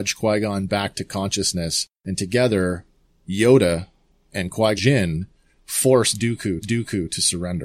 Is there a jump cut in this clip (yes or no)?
yes